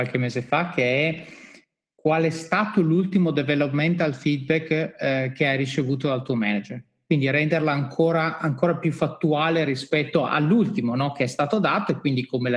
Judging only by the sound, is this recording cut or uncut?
uncut